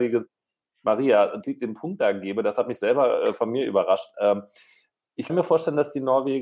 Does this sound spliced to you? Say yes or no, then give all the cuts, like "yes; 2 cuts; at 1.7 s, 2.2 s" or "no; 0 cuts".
yes; 2 cuts; at 1.4 s, 5.3 s